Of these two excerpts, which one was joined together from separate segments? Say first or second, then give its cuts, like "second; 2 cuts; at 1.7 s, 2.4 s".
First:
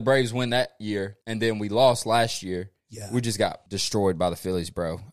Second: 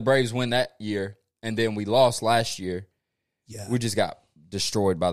first; 3 cuts; at 1.2 s, 2.8 s, 3.7 s